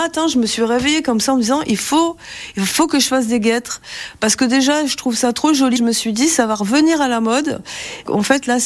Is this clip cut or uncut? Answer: cut